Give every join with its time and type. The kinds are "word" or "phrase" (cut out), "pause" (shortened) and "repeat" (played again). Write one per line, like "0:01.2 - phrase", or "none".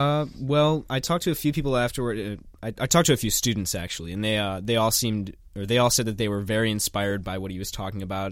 none